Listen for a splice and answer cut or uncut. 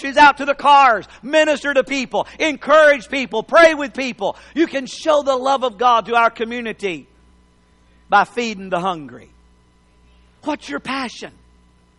uncut